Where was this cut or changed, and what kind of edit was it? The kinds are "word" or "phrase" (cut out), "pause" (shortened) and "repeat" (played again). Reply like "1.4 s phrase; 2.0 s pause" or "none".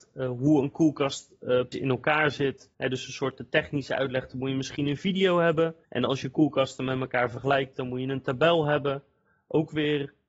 1.7 s word; 2.7 s pause; 5.8 s pause